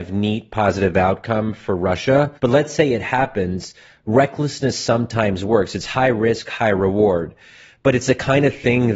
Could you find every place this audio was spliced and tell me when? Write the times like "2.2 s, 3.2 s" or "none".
2.4 s